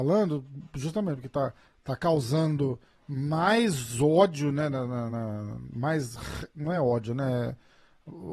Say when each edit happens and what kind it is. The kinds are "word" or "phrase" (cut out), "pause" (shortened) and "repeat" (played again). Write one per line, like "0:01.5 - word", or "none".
none